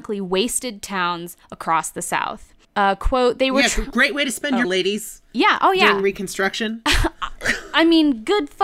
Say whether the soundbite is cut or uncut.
cut